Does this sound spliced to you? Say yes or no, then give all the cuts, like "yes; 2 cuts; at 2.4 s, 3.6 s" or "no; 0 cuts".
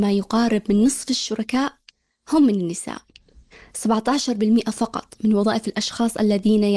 no; 0 cuts